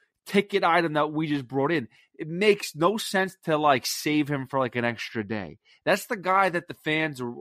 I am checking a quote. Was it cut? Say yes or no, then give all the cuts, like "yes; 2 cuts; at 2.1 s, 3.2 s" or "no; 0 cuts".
no; 0 cuts